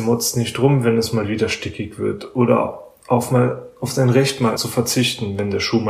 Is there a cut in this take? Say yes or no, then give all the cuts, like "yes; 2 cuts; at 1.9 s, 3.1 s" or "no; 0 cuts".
yes; 1 cut; at 4.6 s